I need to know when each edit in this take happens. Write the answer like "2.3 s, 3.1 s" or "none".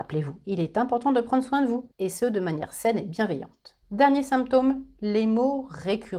1.9 s, 3.8 s